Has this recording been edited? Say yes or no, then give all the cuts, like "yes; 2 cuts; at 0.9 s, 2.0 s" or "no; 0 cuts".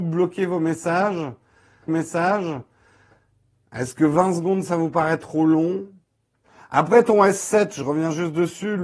yes; 2 cuts; at 1.9 s, 6.4 s